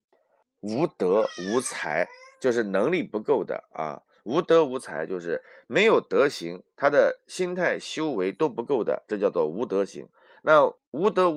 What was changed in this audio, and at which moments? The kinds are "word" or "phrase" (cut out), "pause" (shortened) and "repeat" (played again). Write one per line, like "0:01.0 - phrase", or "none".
0:02.3 - pause